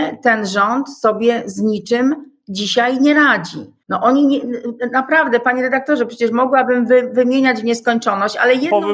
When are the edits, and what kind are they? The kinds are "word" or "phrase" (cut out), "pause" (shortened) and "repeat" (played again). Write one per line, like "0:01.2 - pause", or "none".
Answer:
0:03.8 - pause